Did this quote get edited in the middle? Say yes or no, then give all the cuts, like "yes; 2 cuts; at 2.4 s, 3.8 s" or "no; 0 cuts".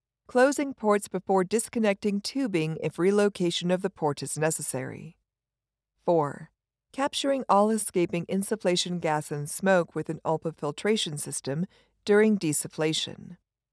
no; 0 cuts